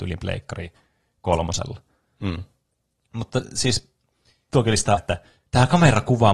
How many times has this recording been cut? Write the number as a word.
two